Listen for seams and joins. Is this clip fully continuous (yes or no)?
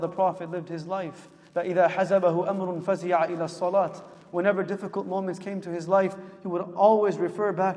yes